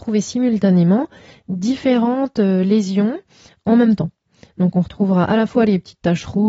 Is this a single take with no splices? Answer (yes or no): yes